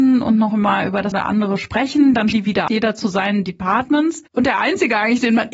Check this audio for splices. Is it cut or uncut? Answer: cut